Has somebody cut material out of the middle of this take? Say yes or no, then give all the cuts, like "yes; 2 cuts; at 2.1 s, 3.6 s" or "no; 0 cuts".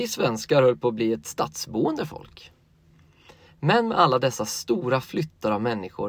no; 0 cuts